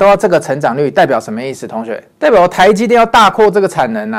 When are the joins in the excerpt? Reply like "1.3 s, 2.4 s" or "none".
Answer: 2.1 s